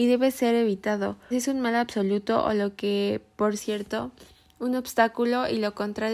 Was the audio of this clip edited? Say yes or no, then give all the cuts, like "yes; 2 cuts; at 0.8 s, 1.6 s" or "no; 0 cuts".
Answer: yes; 2 cuts; at 1.3 s, 3.6 s